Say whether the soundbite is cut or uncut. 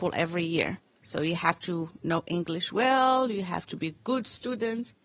uncut